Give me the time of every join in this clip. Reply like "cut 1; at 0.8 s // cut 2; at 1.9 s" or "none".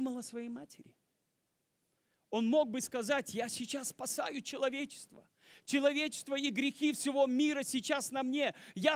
none